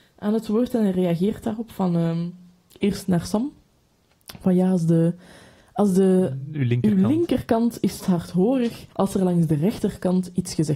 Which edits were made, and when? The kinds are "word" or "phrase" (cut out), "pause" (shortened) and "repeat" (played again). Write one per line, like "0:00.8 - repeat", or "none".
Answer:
0:08.0 - word
0:08.9 - pause